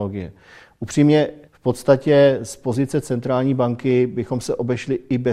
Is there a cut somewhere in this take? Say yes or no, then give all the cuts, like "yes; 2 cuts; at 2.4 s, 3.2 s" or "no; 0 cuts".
yes; 1 cut; at 1.5 s